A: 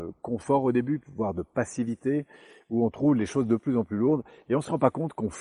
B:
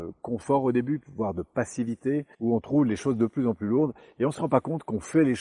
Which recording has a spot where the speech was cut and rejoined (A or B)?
B